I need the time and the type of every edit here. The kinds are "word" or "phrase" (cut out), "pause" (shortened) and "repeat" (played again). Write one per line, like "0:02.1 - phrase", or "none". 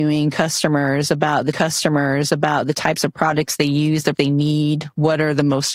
0:01.5 - repeat
0:04.1 - word

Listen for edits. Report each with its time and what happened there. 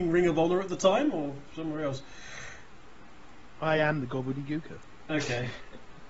none

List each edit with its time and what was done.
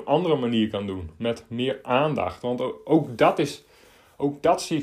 none

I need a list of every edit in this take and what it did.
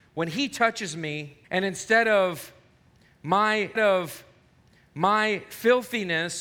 0:01.4 - pause
0:03.8 - repeat

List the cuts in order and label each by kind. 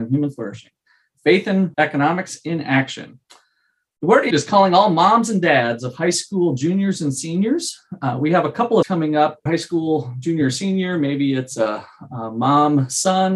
0:04.3 - word
0:08.8 - word
0:09.5 - phrase

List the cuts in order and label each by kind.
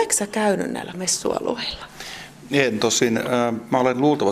0:00.9 - phrase

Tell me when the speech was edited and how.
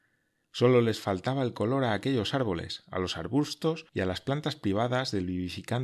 0:03.9 - pause

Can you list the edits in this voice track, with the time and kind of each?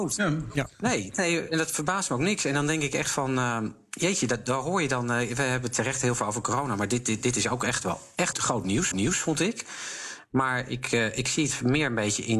0:08.3 - word
0:08.9 - repeat

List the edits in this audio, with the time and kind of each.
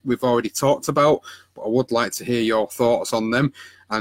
none

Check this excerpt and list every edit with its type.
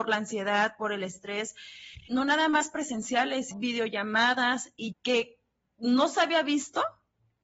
0:02.1 - word
0:03.5 - word
0:04.9 - word

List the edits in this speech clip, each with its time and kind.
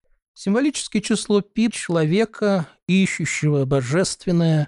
0:01.7 - word

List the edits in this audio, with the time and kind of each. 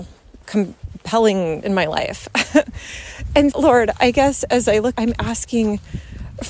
0:01.6 - word
0:03.5 - word
0:04.9 - word

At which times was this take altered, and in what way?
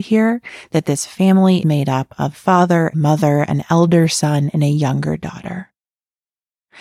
0:01.6 - word
0:02.3 - word
0:02.9 - word

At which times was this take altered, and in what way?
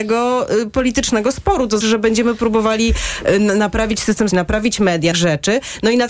0:01.8 - word
0:04.3 - word
0:05.1 - phrase

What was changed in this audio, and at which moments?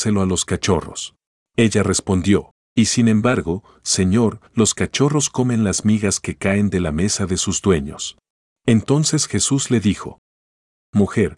0:01.4 - pause
0:02.6 - pause
0:04.5 - pause
0:08.5 - pause

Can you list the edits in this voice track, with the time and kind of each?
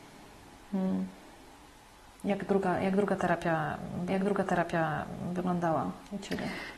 0:04.1 - repeat

